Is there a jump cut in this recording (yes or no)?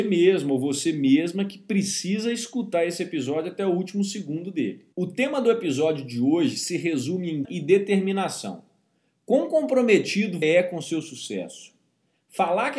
yes